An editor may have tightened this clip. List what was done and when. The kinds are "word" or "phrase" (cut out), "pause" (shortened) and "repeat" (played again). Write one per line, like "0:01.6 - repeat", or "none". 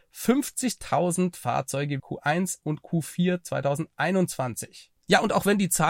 0:02.0 - phrase